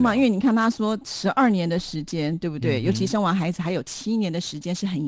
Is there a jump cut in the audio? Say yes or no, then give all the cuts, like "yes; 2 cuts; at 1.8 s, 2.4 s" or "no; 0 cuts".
no; 0 cuts